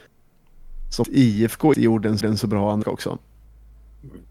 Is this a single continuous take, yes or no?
no